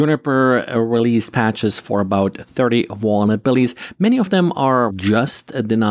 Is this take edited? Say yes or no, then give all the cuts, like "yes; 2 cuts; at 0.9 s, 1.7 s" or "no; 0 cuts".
yes; 1 cut; at 4.9 s